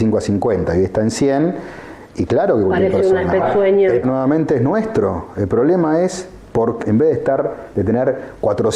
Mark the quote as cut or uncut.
cut